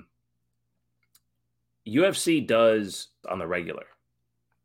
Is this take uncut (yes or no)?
no